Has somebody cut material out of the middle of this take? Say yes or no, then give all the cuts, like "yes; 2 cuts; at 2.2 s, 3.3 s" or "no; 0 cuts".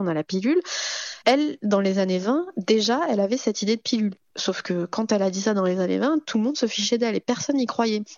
yes; 1 cut; at 1.2 s